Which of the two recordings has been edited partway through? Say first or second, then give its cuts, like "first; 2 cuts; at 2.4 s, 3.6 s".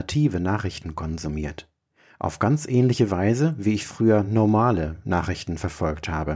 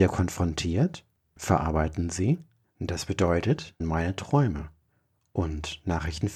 second; 2 cuts; at 1.4 s, 3.8 s